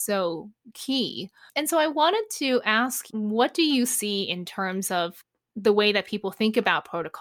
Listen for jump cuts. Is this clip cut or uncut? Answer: uncut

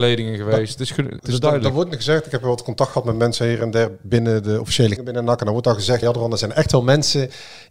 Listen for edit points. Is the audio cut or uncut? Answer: cut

